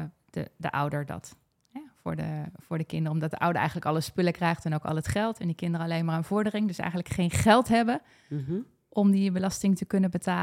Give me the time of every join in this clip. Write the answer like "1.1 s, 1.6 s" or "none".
none